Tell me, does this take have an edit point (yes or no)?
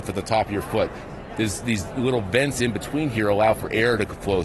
no